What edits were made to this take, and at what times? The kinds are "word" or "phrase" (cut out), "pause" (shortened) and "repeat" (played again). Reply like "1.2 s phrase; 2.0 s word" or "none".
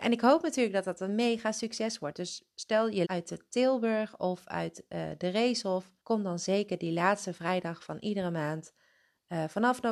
3.0 s phrase; 6.0 s pause